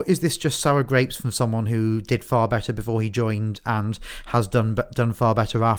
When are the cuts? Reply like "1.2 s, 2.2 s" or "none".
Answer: none